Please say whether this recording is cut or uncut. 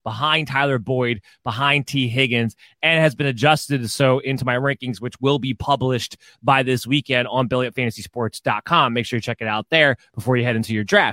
uncut